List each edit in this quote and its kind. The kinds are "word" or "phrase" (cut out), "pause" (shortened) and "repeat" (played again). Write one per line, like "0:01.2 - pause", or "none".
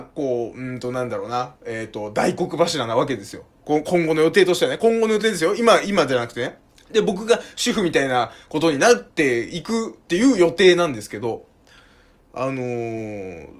0:06.7 - pause